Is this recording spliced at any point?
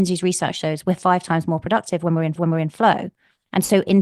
yes; 1 cut; at 2.4 s

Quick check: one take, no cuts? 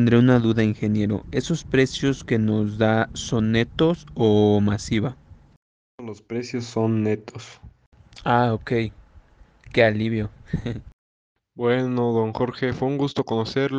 yes; 0 cuts

